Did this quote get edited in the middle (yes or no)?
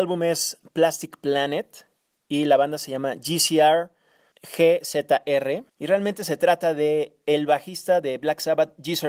no